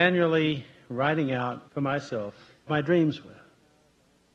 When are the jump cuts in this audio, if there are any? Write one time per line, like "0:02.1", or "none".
0:01.7
0:02.7